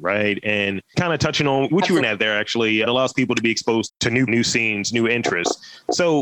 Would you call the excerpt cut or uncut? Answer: cut